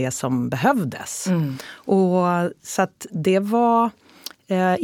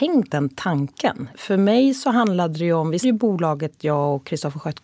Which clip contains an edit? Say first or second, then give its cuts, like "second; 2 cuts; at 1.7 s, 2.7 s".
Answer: second; 2 cuts; at 1.3 s, 3.0 s